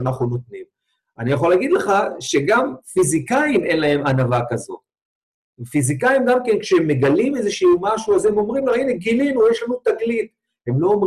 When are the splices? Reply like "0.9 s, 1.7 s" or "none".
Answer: none